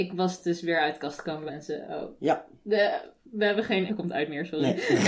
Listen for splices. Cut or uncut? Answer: cut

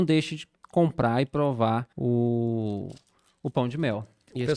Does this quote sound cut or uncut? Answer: cut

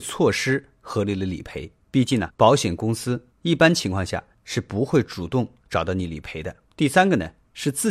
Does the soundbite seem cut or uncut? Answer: cut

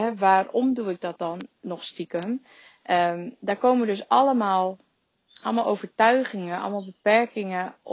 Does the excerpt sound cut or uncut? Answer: uncut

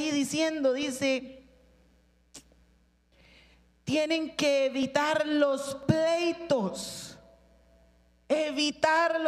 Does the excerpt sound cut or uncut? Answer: uncut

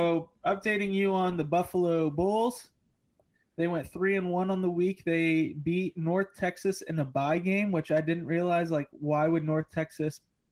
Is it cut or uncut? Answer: uncut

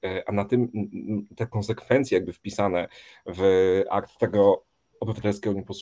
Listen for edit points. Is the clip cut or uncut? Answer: uncut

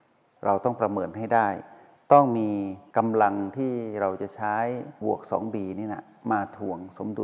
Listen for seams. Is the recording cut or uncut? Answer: cut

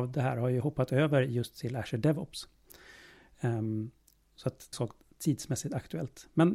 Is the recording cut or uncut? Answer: cut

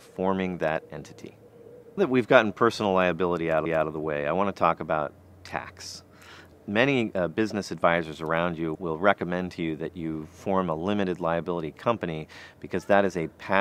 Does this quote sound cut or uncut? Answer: cut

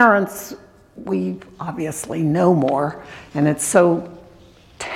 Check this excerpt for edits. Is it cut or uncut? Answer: uncut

